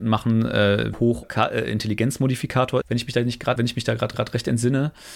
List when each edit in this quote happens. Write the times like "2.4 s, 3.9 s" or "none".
0.9 s, 1.2 s, 2.8 s, 3.6 s, 4.1 s

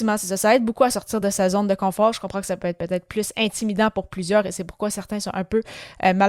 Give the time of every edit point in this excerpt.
none

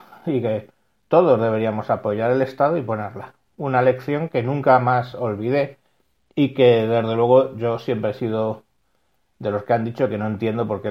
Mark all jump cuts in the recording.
none

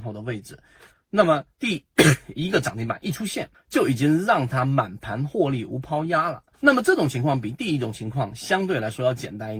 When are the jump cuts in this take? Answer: 1.5 s, 3.5 s, 6.5 s

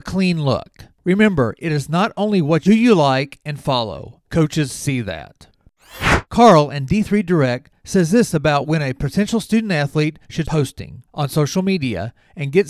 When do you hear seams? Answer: 2.7 s, 4.2 s, 6.3 s, 10.4 s

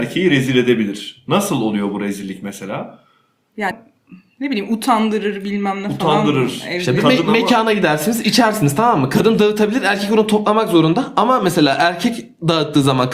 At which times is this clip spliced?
3.7 s

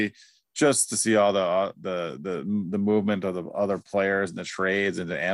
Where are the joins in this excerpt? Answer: none

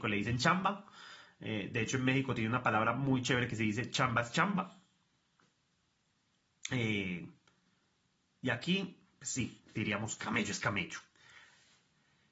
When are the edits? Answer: none

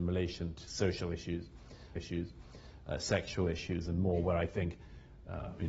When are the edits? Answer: 2.0 s

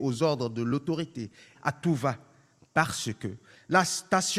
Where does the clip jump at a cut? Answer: 1.5 s

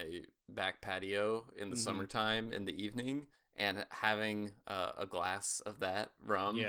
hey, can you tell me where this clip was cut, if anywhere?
3.3 s

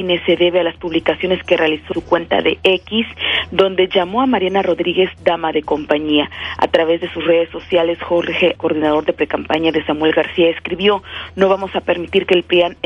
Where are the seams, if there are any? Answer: 1.9 s, 8.6 s

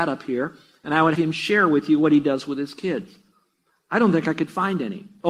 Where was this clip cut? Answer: 1.1 s

